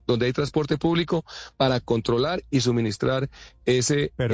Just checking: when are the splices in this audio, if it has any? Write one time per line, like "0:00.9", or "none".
none